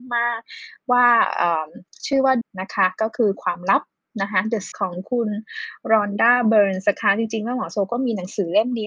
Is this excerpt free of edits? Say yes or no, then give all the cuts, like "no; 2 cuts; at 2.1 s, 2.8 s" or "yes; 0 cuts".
no; 2 cuts; at 2.4 s, 4.7 s